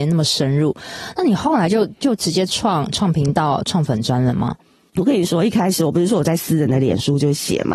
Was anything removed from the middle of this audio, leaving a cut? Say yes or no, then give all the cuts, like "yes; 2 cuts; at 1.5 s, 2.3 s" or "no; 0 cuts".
no; 0 cuts